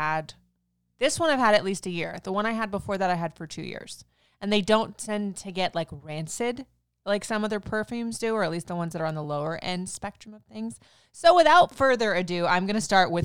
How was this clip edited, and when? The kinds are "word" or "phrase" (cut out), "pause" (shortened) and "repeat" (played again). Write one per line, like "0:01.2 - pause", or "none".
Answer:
none